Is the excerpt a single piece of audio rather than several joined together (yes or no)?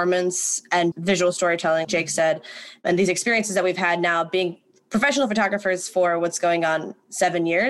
no